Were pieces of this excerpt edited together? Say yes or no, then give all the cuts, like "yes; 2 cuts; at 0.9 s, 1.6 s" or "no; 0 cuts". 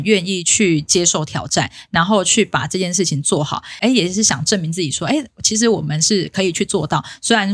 no; 0 cuts